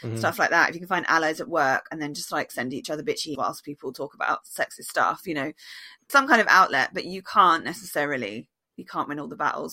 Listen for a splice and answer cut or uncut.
cut